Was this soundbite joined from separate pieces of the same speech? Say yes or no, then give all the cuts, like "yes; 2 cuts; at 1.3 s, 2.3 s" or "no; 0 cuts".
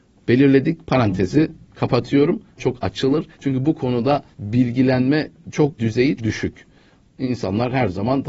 yes; 5 cuts; at 2.6 s, 3.3 s, 4.3 s, 5.8 s, 6.2 s